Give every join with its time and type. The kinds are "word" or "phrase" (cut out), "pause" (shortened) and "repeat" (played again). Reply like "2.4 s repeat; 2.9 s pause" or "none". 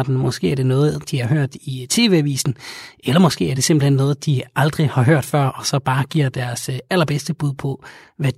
none